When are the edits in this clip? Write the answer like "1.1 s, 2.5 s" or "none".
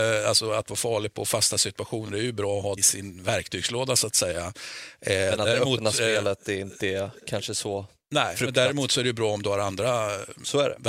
2.8 s